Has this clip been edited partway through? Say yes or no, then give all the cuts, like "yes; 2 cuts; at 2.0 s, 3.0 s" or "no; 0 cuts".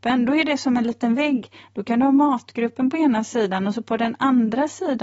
no; 0 cuts